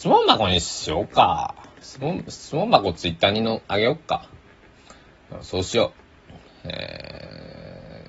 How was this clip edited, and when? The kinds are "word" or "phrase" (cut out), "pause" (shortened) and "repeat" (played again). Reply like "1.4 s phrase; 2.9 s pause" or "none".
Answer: none